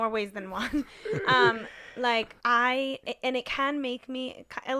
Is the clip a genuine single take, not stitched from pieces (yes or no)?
no